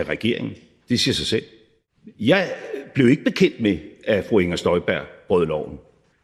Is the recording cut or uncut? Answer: uncut